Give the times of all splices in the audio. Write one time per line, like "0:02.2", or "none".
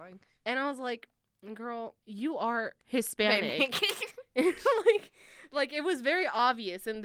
0:02.0
0:02.8